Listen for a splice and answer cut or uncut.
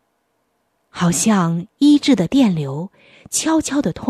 uncut